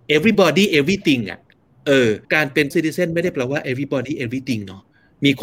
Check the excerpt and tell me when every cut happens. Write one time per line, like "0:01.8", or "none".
0:02.2
0:02.7